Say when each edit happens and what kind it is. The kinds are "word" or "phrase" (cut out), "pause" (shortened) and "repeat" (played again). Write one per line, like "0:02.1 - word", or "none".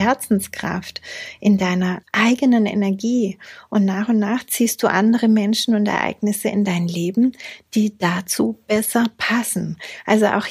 0:02.0 - pause